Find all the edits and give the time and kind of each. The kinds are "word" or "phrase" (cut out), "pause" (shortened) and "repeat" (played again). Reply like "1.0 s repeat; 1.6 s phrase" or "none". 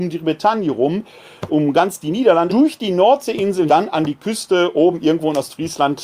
1.5 s word; 2.5 s word; 3.7 s word